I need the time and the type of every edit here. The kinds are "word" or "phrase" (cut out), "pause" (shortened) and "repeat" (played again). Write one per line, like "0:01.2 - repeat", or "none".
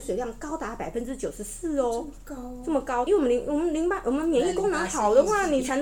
0:03.1 - word